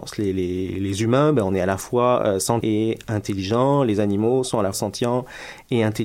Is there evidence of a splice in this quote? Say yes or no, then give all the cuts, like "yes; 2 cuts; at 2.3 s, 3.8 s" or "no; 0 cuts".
yes; 2 cuts; at 2.6 s, 4.7 s